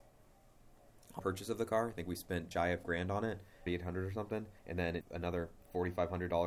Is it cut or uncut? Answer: cut